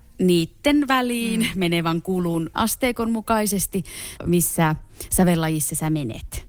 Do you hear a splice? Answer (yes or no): yes